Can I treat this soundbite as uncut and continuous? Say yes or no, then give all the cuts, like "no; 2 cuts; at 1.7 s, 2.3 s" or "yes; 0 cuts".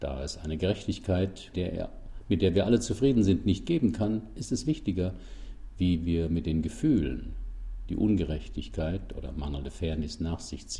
no; 1 cut; at 1.5 s